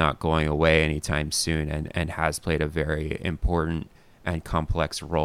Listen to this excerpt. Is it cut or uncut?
uncut